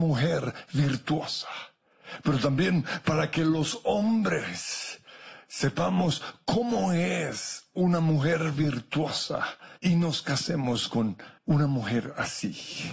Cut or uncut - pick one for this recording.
cut